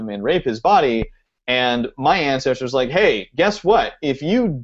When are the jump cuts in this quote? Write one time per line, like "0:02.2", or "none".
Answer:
none